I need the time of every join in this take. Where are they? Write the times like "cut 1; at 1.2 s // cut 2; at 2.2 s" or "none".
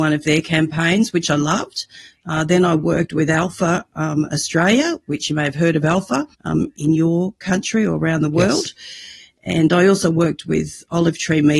cut 1; at 6.3 s